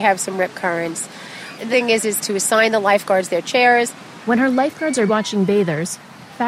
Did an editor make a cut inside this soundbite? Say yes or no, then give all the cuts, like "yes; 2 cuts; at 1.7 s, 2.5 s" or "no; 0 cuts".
yes; 2 cuts; at 1.7 s, 5.1 s